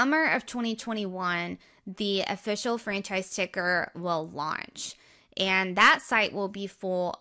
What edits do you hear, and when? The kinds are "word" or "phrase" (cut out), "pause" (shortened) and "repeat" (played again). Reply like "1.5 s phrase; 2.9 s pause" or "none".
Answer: 3.9 s word